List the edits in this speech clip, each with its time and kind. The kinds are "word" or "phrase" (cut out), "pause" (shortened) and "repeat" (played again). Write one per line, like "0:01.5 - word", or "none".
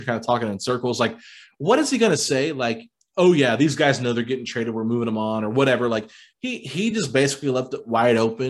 none